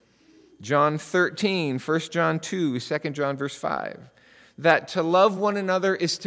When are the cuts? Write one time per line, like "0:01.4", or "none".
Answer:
none